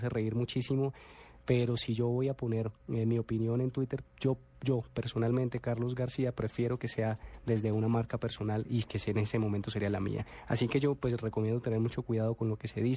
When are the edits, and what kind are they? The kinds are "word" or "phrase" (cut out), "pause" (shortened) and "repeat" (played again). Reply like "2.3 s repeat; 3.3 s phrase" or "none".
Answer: none